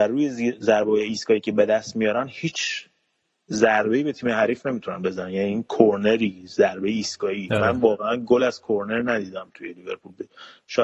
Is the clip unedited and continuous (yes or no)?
yes